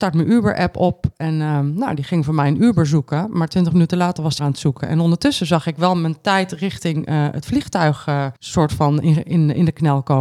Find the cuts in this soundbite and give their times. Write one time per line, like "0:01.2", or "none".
0:04.4
0:08.4